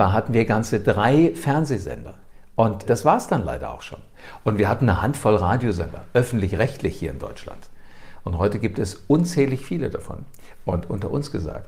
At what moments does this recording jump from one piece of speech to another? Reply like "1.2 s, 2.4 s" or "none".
2.8 s